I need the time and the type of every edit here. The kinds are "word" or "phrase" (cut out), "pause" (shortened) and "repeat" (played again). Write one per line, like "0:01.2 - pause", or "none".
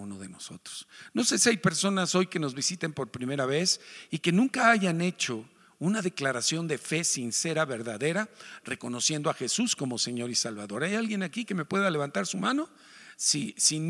none